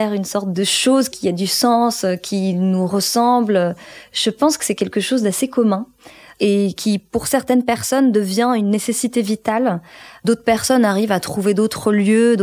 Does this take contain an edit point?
no; 0 cuts

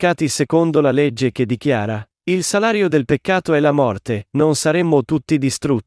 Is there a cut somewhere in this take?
no; 0 cuts

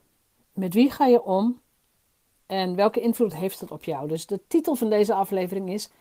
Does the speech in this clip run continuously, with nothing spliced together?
yes; 0 cuts

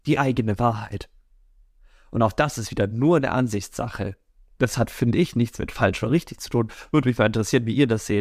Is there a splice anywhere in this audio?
no; 0 cuts

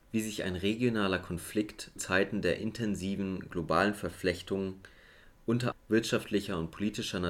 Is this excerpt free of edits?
no; 2 cuts; at 2.0 s, 5.7 s

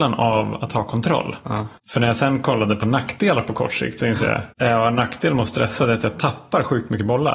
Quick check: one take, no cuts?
no; 2 cuts; at 1.8 s, 4.5 s

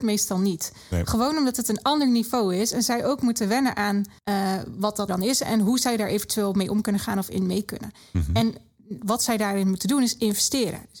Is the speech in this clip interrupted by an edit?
yes; 2 cuts; at 4.2 s, 5.1 s

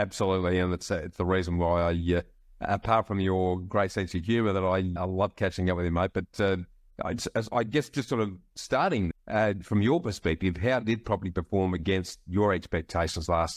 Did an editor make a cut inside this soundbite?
yes; 2 cuts; at 5.0 s, 9.1 s

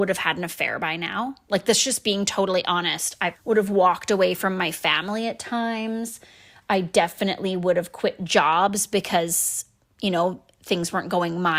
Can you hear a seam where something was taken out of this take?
yes; 1 cut; at 3.3 s

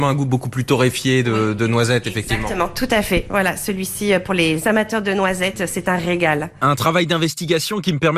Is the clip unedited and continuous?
yes; 0 cuts

